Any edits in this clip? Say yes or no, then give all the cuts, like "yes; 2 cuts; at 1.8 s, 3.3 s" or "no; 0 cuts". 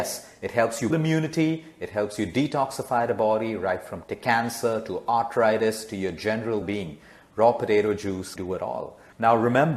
yes; 4 cuts; at 0.9 s, 4.0 s, 6.6 s, 8.4 s